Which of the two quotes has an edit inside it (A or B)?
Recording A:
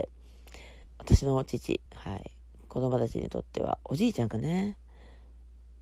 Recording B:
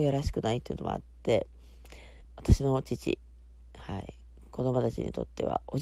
A